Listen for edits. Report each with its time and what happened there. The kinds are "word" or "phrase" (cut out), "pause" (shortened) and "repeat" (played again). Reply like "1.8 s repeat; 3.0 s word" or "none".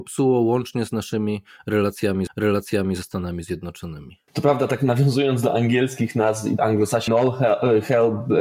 2.3 s repeat; 4.3 s pause; 6.6 s word; 7.1 s phrase